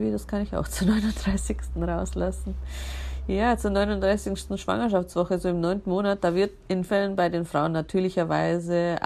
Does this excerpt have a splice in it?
yes; 1 cut; at 6.9 s

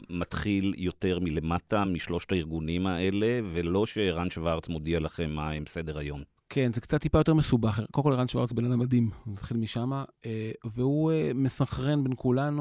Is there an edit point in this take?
no; 0 cuts

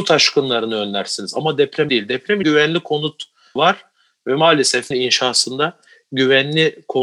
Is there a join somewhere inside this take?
yes; 4 cuts; at 1.9 s, 2.4 s, 3.6 s, 4.9 s

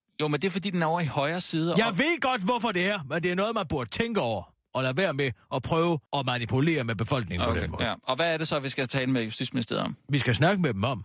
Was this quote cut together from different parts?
yes; 1 cut; at 6.1 s

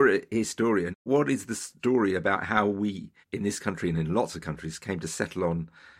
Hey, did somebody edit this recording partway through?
yes; 1 cut; at 3.2 s

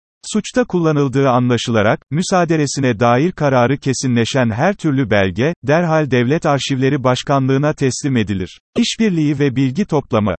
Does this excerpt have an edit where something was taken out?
yes; 1 cut; at 8.7 s

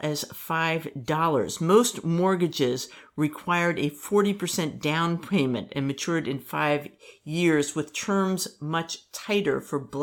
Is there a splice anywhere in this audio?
no; 0 cuts

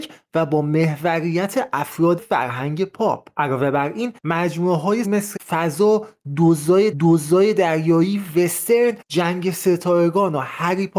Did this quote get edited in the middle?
yes; 6 cuts; at 2.2 s, 4.2 s, 5.0 s, 5.4 s, 6.9 s, 9.0 s

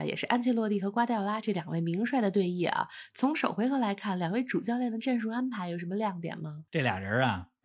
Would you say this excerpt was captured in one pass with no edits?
no; 1 cut; at 6.7 s

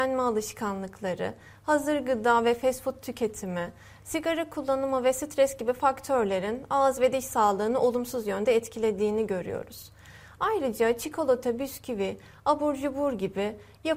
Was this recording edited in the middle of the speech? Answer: no; 0 cuts

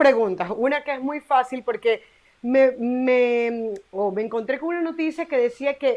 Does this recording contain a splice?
no; 0 cuts

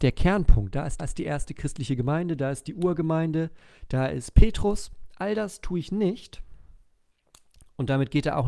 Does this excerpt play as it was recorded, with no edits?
no; 1 cut; at 1.0 s

